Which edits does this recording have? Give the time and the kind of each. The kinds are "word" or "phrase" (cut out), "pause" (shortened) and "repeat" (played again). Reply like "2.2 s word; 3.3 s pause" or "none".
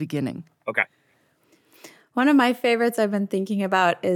none